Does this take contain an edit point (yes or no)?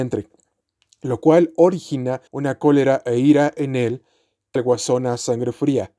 yes